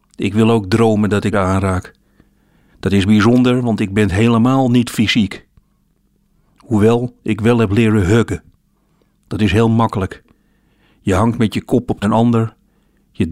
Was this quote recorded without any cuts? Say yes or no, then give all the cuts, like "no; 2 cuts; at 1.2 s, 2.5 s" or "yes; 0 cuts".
no; 2 cuts; at 1.3 s, 12.0 s